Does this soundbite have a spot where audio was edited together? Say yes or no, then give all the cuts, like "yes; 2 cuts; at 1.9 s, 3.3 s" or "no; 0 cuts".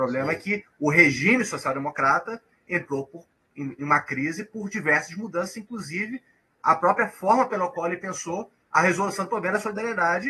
no; 0 cuts